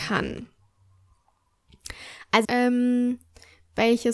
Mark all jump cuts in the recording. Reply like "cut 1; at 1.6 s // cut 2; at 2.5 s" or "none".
cut 1; at 2.4 s